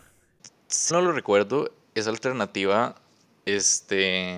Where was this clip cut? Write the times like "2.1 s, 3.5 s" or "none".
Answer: 0.9 s